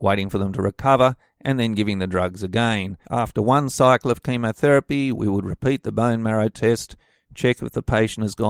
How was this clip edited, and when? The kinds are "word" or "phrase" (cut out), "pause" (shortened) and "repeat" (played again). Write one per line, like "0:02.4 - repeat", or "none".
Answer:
0:03.0 - pause